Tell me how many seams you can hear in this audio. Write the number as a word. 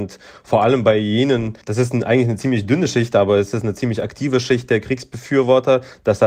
one